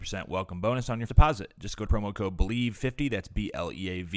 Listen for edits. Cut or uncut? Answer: cut